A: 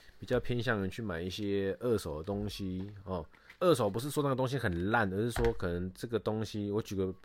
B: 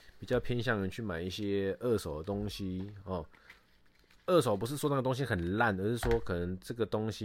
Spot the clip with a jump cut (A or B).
A